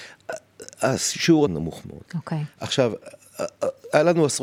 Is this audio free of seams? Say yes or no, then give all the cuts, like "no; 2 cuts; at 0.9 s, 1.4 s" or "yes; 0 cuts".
no; 2 cuts; at 1.5 s, 2.1 s